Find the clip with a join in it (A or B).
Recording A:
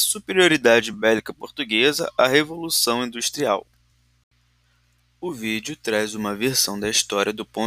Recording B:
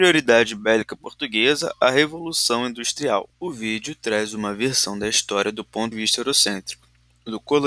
B